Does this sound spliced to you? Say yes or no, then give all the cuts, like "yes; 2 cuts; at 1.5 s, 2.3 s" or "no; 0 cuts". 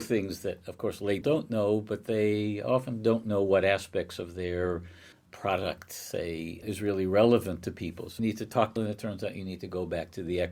yes; 5 cuts; at 1.2 s, 5.1 s, 6.6 s, 8.2 s, 8.8 s